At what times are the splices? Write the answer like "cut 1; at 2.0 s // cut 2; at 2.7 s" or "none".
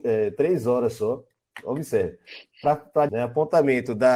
cut 1; at 3.1 s